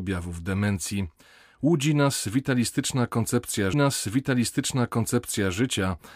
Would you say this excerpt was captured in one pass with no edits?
no; 1 cut; at 3.7 s

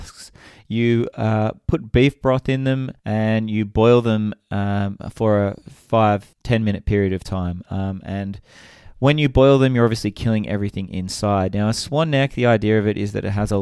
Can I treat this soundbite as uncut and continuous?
no; 2 cuts; at 3.0 s, 6.3 s

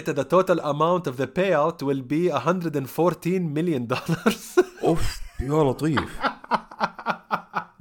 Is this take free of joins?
yes; 0 cuts

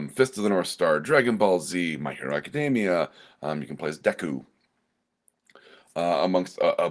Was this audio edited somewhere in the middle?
no; 0 cuts

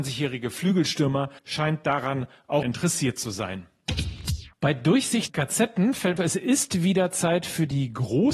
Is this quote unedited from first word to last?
no; 5 cuts; at 1.4 s, 2.6 s, 4.5 s, 5.3 s, 6.2 s

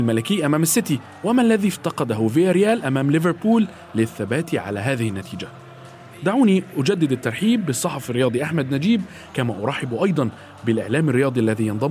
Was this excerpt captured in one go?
yes; 0 cuts

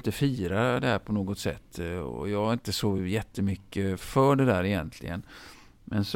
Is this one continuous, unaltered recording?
yes; 0 cuts

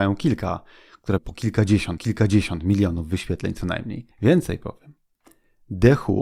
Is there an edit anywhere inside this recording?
yes; 3 cuts; at 1.2 s, 2.0 s, 4.1 s

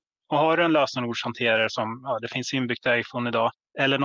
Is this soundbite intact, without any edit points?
yes; 0 cuts

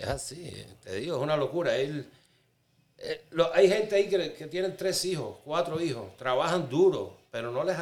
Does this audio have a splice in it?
no; 0 cuts

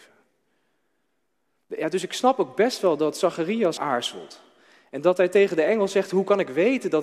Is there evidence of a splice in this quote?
yes; 1 cut; at 3.8 s

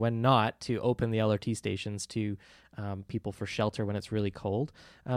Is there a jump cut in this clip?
no; 0 cuts

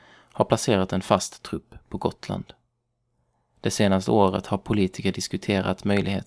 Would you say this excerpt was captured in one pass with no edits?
yes; 0 cuts

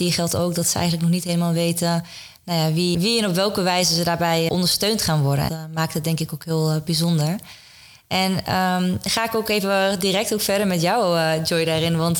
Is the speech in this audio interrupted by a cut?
yes; 3 cuts; at 2.9 s, 4.5 s, 5.5 s

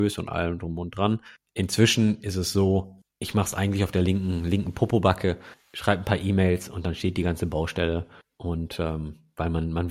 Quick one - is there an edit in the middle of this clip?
no; 0 cuts

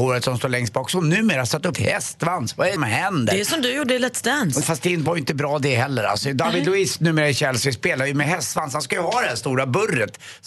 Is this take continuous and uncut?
no; 3 cuts; at 1.7 s, 2.8 s, 4.6 s

